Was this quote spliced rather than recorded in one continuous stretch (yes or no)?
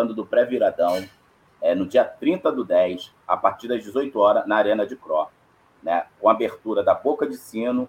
no